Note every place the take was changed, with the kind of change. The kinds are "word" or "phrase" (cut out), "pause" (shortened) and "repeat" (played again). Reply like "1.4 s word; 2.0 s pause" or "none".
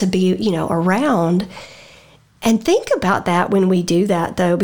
none

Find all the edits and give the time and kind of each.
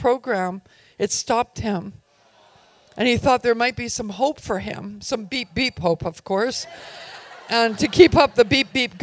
none

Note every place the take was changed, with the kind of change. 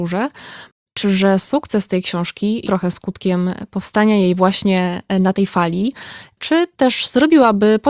1.0 s word; 2.6 s word

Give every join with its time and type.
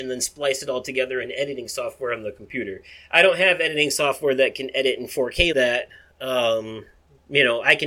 5.5 s word

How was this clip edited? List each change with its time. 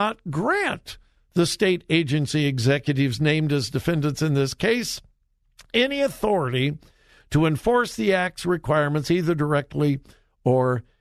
none

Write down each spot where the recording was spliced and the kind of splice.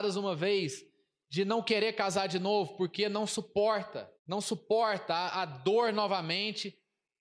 4.2 s pause

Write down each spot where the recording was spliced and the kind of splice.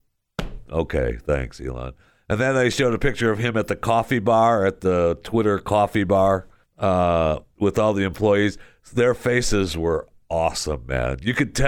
6.6 s pause

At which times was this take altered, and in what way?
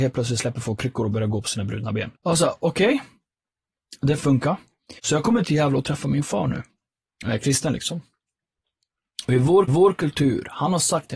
2.2 s pause; 5.0 s pause; 5.4 s word; 9.7 s repeat

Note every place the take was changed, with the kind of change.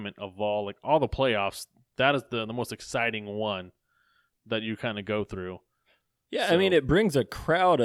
none

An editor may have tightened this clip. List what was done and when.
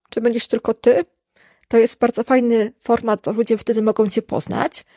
none

